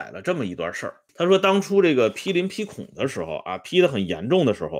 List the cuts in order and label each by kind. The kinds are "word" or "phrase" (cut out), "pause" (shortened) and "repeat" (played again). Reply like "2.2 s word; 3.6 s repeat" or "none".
1.1 s pause